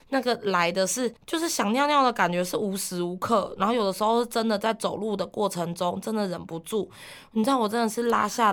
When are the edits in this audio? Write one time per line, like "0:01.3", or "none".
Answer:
0:01.2